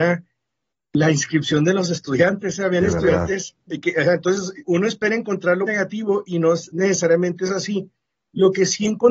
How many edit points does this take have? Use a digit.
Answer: 2